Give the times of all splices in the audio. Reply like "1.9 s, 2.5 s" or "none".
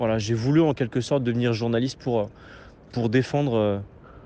none